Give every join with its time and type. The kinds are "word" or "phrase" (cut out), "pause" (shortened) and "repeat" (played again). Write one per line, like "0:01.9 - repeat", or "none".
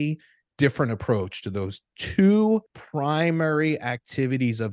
0:02.7 - pause